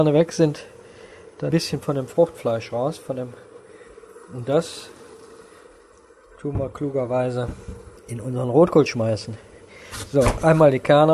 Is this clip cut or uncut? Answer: cut